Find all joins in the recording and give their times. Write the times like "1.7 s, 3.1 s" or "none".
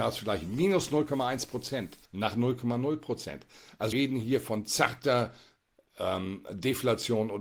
2.1 s, 3.9 s